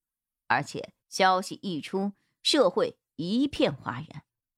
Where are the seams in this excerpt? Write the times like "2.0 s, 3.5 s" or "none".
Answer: 1.0 s